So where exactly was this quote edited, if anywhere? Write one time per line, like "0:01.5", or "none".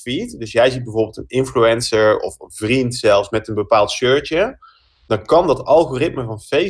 none